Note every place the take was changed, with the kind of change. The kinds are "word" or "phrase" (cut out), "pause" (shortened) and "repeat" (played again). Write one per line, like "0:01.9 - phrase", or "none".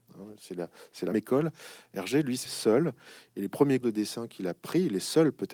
0:01.1 - word
0:02.5 - word
0:03.8 - word